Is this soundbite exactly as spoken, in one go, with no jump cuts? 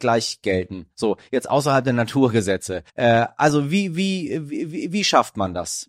no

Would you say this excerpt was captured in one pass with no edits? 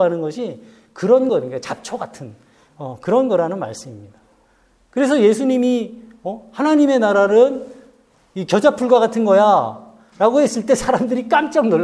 yes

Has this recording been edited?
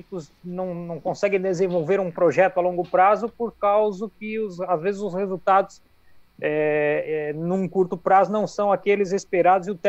no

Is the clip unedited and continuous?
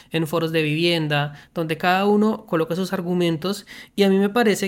yes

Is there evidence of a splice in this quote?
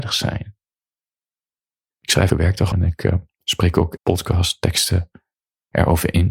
yes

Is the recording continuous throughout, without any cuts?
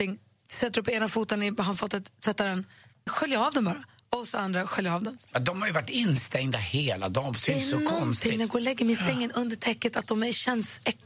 no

